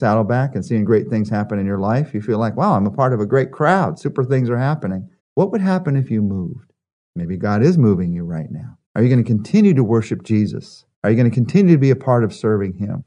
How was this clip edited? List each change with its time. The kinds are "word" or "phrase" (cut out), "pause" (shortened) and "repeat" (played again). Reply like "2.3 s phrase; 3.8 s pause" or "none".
5.2 s pause; 7.0 s pause; 8.8 s pause; 10.9 s pause